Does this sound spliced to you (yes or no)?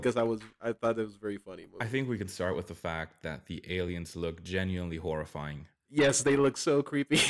yes